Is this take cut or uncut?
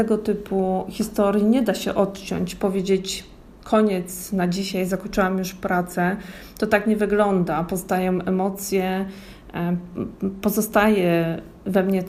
uncut